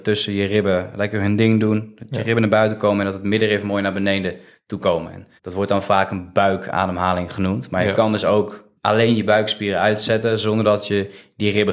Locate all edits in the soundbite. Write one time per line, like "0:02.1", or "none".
0:04.8
0:05.4
0:08.8